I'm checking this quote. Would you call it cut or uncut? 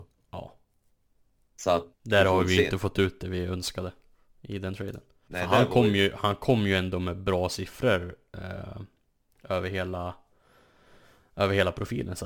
cut